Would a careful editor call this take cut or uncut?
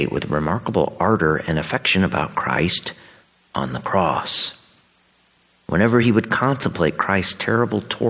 uncut